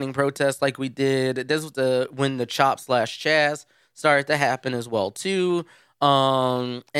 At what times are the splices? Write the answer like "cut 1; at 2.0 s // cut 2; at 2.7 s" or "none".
none